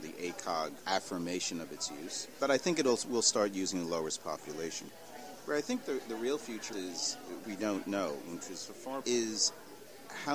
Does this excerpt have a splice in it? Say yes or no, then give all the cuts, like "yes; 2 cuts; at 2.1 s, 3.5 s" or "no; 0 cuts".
yes; 4 cuts; at 2.4 s, 6.7 s, 7.4 s, 9.0 s